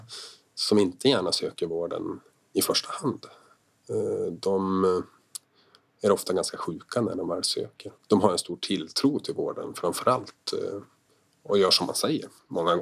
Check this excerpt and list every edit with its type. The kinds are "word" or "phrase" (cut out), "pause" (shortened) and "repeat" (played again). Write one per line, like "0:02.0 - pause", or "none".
0:08.0 - pause